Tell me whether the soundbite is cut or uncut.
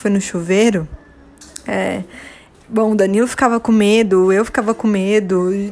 uncut